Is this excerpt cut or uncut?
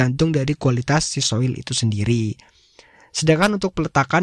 uncut